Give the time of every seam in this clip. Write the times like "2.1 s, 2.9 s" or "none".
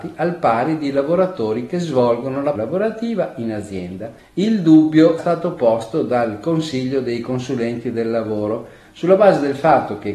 2.5 s, 4.2 s, 5.2 s

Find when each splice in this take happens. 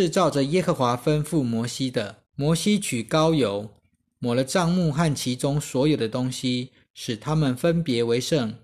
2.3 s

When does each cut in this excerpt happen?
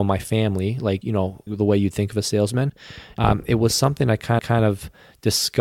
1.0 s, 1.5 s, 4.4 s

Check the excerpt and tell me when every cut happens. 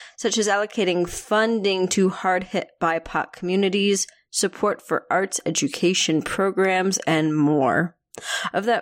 none

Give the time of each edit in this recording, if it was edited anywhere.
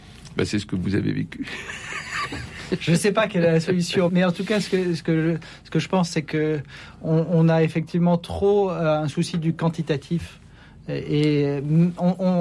4.1 s

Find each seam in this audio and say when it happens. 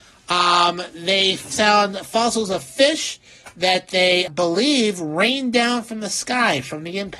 4.3 s

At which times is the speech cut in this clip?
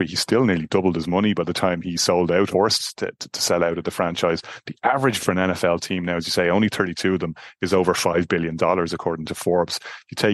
2.5 s, 5.2 s

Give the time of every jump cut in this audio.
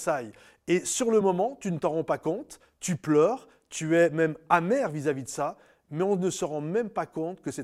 none

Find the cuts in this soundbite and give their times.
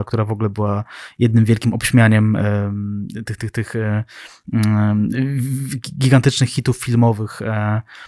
none

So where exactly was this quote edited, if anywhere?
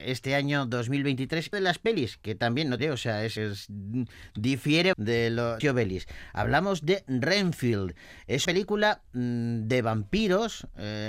1.5 s, 2.8 s, 3.4 s, 4.9 s, 5.6 s, 8.4 s

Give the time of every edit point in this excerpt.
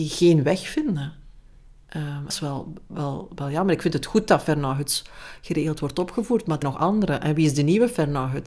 2.3 s, 6.6 s

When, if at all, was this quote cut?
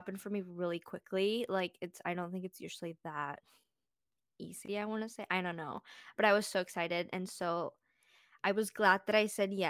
none

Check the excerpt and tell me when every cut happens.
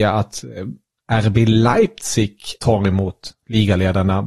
2.6 s

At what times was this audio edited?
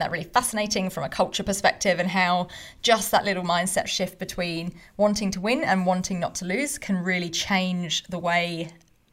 none

